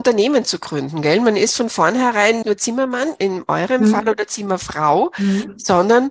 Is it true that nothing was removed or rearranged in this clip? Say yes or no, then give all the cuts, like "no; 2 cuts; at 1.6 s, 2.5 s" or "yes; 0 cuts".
no; 1 cut; at 2.4 s